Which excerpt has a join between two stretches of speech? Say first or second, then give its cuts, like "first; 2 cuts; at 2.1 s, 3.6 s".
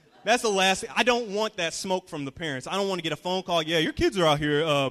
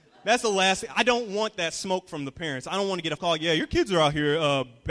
second; 1 cut; at 3.2 s